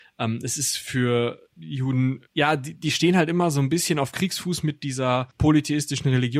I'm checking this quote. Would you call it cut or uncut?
cut